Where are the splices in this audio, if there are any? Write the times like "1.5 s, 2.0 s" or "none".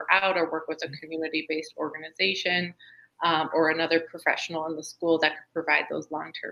none